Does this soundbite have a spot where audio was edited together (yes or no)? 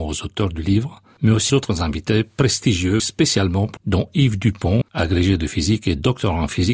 yes